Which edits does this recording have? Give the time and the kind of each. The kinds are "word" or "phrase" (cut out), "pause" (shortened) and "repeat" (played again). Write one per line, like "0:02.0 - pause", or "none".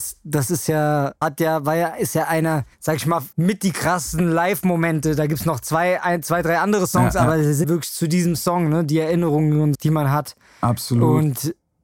0:01.2 - word
0:02.7 - pause
0:03.3 - pause
0:07.6 - word
0:09.7 - word